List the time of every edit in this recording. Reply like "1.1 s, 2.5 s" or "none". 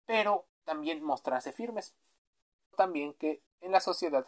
2.7 s